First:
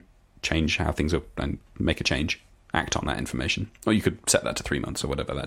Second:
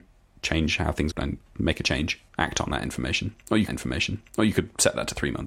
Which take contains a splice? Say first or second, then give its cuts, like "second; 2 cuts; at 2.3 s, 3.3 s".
second; 3 cuts; at 1.1 s, 2.3 s, 3.7 s